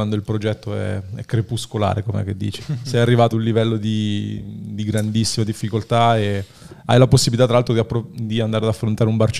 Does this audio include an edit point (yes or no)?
yes